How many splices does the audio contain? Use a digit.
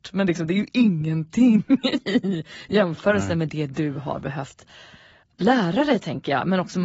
0